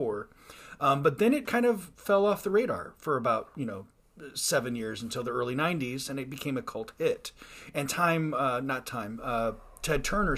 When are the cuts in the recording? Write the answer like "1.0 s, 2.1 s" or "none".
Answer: 1.4 s